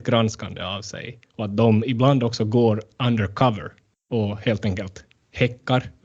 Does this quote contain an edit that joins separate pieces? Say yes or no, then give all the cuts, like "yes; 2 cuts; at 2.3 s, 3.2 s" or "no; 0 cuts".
yes; 1 cut; at 1.3 s